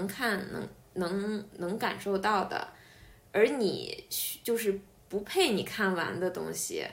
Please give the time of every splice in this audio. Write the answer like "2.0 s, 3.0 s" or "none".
none